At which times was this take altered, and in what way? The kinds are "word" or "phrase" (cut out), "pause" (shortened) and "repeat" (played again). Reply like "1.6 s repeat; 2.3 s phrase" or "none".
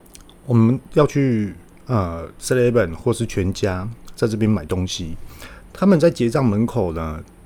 1.8 s pause